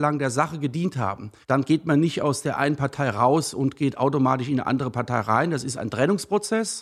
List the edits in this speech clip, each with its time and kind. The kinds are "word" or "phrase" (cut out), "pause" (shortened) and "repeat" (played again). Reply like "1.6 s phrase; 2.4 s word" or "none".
1.4 s pause

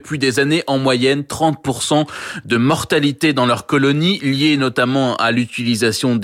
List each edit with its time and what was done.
none

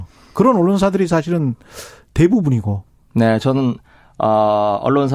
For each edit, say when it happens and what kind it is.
none

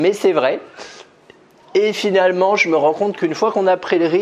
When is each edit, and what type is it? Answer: none

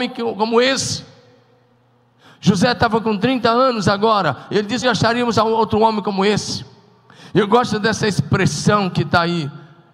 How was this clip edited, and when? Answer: 4.8 s word

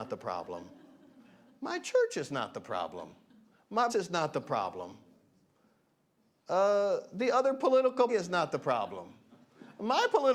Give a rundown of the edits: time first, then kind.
3.9 s word; 8.1 s word

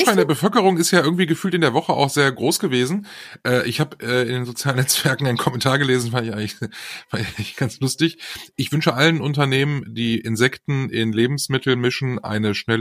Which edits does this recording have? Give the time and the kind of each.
none

